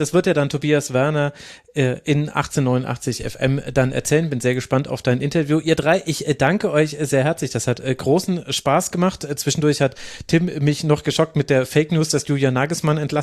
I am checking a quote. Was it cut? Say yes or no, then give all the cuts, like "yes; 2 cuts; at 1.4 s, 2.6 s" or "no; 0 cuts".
no; 0 cuts